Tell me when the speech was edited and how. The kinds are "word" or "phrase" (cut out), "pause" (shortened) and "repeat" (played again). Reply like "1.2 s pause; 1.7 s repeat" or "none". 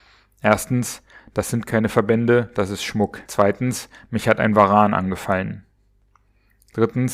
3.2 s pause